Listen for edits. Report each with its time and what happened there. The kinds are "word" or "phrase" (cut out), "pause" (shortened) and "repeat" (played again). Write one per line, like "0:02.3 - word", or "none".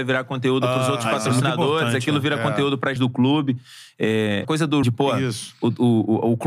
0:03.0 - phrase
0:04.4 - word
0:04.8 - phrase